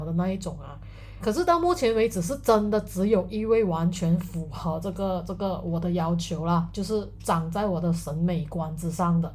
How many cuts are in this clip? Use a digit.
1